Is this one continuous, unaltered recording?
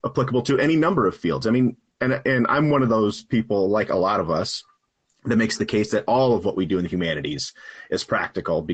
yes; 0 cuts

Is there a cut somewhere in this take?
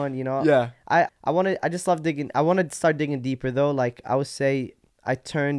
yes; 1 cut; at 1.1 s

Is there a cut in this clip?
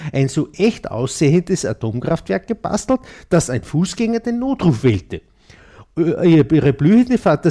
no; 0 cuts

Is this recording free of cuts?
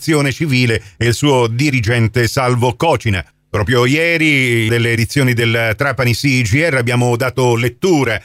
no; 1 cut; at 4.7 s

